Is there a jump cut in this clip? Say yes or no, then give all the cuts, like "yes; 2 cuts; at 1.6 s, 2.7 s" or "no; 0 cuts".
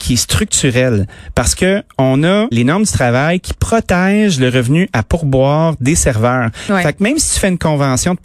yes; 1 cut; at 2.5 s